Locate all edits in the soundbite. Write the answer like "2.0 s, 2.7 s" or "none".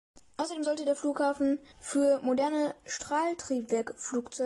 1.7 s